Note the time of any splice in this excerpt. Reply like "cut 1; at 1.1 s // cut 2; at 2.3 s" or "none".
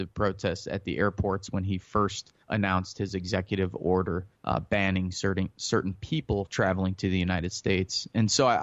cut 1; at 2.4 s // cut 2; at 4.3 s // cut 3; at 6.5 s